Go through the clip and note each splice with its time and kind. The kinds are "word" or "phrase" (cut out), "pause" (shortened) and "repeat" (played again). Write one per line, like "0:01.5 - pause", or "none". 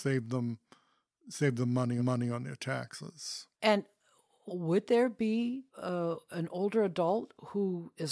0:02.0 - repeat
0:03.5 - pause
0:05.7 - pause